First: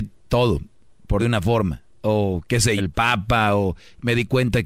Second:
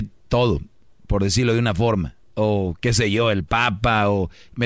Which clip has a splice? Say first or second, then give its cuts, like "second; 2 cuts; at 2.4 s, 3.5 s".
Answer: first; 2 cuts; at 1.2 s, 2.8 s